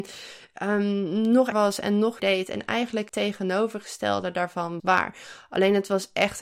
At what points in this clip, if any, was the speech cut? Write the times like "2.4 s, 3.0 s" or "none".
1.5 s, 2.2 s, 3.1 s, 4.8 s